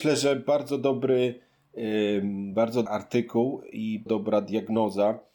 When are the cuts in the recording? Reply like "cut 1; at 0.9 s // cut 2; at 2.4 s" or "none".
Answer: cut 1; at 2.9 s // cut 2; at 4.1 s